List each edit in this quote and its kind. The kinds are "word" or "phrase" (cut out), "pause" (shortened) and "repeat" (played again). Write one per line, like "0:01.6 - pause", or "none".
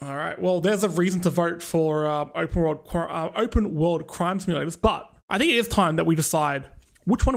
0:05.2 - pause